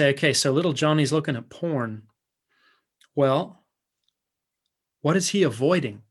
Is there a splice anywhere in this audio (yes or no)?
no